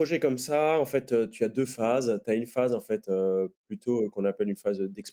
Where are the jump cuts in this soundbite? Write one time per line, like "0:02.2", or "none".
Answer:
0:03.5